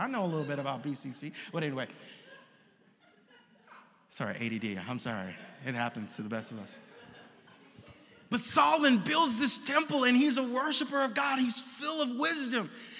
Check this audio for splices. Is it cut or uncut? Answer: uncut